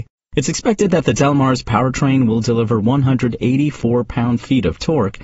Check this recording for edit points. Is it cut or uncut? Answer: uncut